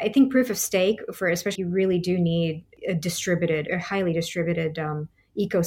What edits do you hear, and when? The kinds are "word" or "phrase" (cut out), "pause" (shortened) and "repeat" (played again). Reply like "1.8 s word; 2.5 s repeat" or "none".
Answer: 1.6 s phrase; 3.7 s word